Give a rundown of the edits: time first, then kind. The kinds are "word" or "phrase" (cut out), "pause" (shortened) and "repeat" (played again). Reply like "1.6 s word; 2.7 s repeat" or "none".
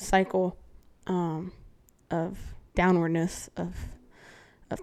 2.7 s pause